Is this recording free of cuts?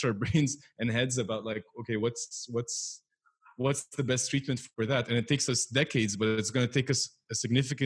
yes; 0 cuts

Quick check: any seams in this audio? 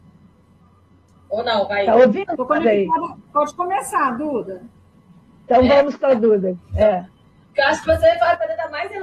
no; 0 cuts

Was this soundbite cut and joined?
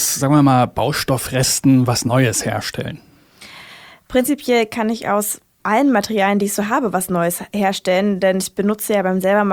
no; 0 cuts

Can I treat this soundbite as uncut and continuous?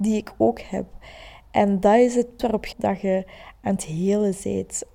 no; 2 cuts; at 2.4 s, 2.7 s

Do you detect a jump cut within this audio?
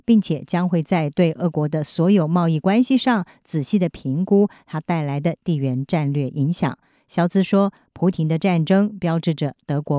no; 0 cuts

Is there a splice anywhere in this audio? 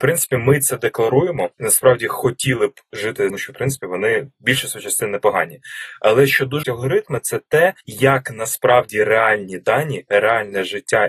yes; 4 cuts; at 1.5 s, 3.3 s, 6.6 s, 7.8 s

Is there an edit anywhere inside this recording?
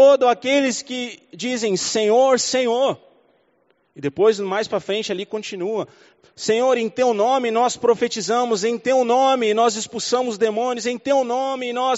no; 0 cuts

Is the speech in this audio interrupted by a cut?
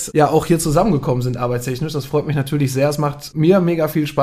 no; 0 cuts

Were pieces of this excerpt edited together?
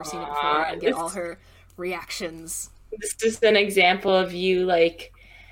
no; 0 cuts

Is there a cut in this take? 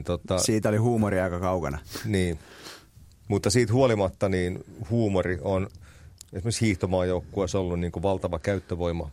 no; 0 cuts

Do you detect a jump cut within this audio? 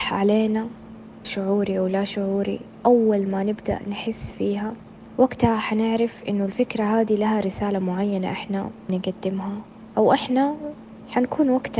yes; 2 cuts; at 1.2 s, 8.9 s

